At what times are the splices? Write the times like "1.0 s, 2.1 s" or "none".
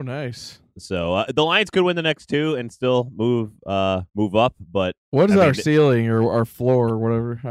4.1 s, 5.0 s